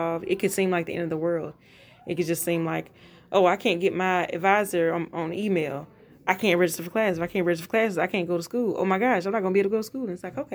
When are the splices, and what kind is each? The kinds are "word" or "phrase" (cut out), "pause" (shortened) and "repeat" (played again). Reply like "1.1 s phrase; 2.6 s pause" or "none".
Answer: none